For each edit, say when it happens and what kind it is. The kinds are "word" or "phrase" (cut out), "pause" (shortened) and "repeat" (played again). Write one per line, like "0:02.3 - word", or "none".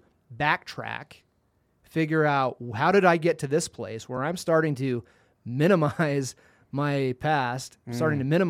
none